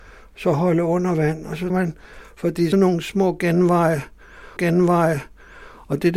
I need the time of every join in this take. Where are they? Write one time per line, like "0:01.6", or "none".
0:01.7
0:02.7
0:04.6